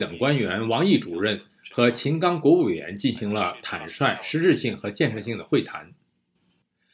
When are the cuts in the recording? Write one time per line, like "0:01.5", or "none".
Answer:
none